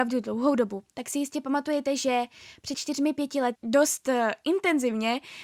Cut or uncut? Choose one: cut